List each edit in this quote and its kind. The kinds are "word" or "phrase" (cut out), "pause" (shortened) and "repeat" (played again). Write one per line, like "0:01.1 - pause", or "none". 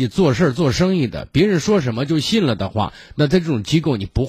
none